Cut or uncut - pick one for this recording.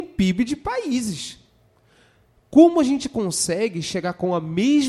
uncut